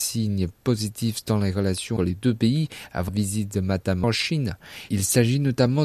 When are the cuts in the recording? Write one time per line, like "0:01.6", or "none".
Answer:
0:02.0
0:03.1
0:04.0